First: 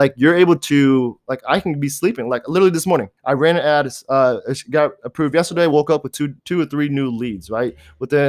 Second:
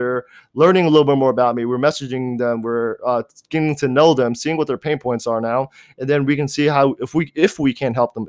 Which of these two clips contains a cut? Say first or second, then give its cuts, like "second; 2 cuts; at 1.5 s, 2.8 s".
first; 2 cuts; at 3.2 s, 6.4 s